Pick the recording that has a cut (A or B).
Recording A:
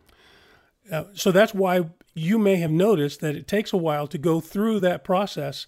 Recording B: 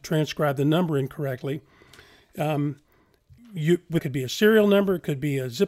B